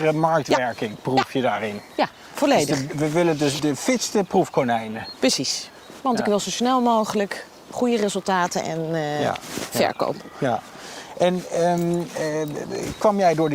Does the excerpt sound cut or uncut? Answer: cut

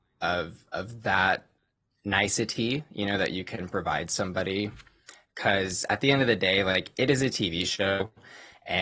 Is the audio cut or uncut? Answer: cut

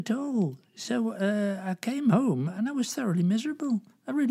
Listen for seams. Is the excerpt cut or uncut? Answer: uncut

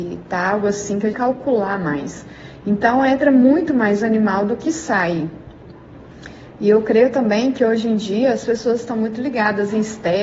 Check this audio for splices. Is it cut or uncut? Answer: cut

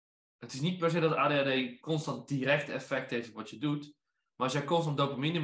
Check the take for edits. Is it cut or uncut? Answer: uncut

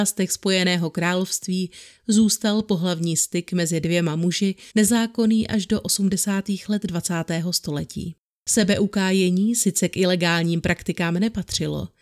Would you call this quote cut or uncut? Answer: cut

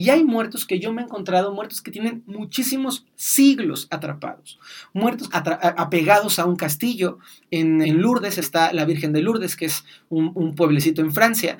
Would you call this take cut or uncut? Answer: cut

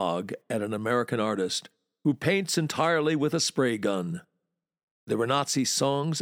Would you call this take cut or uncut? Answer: uncut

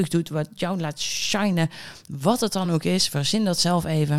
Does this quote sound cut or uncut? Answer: uncut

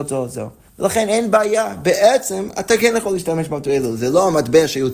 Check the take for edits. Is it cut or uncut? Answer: uncut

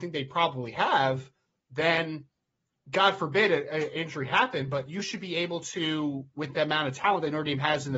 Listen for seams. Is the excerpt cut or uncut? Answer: uncut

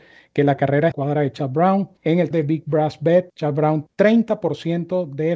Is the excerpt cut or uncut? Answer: cut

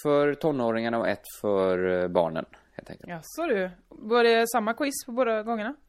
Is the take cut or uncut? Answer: uncut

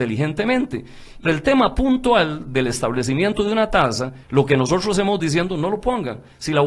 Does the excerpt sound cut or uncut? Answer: cut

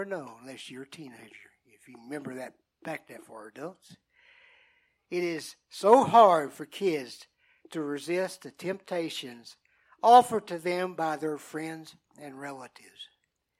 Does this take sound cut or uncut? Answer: uncut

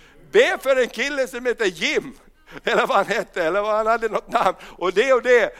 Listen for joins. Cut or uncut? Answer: uncut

